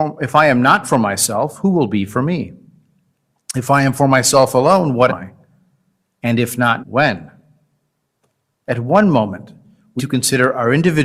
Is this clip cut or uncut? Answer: cut